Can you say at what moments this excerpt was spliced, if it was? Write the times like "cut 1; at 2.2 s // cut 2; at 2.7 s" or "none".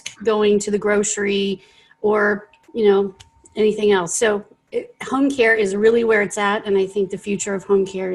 none